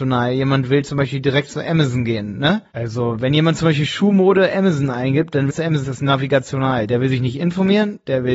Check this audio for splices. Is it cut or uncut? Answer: cut